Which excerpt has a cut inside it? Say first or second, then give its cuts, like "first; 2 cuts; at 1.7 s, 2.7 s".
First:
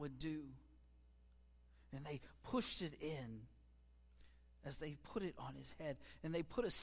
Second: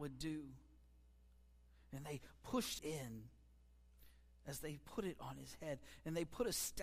second; 1 cut; at 2.8 s